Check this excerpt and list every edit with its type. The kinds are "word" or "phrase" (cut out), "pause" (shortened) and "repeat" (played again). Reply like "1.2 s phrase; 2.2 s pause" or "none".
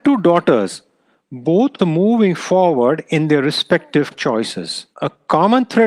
1.8 s word; 4.1 s word; 4.9 s pause